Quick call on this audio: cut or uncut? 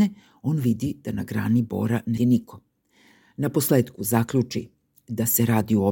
cut